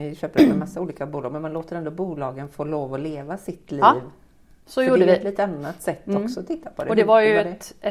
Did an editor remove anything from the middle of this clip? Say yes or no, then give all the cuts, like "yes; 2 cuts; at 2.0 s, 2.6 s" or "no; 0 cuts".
no; 0 cuts